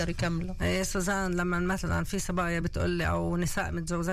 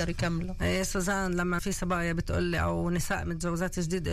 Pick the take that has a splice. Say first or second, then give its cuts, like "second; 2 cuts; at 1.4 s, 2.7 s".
second; 1 cut; at 1.6 s